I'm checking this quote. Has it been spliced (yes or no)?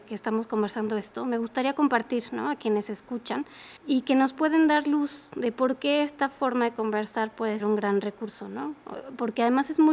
yes